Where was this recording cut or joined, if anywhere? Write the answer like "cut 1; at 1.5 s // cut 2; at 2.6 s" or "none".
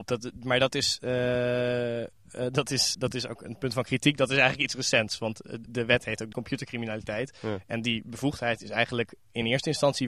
cut 1; at 2.9 s // cut 2; at 5.6 s // cut 3; at 6.3 s

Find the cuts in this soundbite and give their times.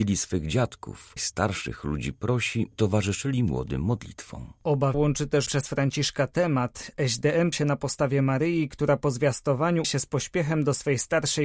cut 1; at 1.2 s // cut 2; at 2.7 s // cut 3; at 4.9 s // cut 4; at 5.5 s // cut 5; at 7.5 s // cut 6; at 9.8 s

